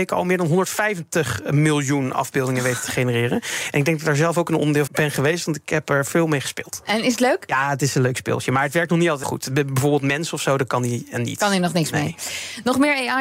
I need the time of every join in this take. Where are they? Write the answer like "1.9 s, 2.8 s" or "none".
4.9 s, 9.2 s